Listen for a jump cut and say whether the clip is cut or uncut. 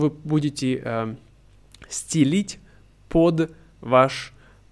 uncut